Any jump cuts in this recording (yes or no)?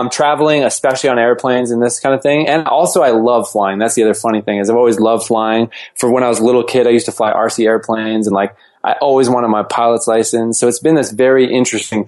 no